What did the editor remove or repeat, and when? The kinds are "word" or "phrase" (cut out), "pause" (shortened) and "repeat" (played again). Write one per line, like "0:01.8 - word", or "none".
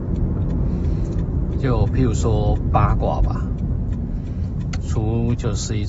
none